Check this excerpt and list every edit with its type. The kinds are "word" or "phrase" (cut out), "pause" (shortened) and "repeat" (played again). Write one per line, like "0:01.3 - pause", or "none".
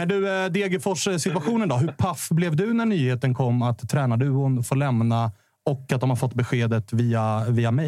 none